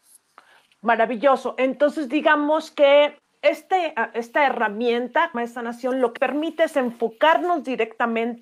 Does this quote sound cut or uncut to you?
cut